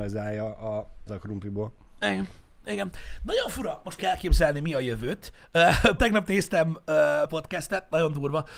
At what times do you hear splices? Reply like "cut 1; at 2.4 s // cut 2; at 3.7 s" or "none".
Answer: cut 1; at 1.1 s // cut 2; at 4.0 s // cut 3; at 6.0 s // cut 4; at 7.3 s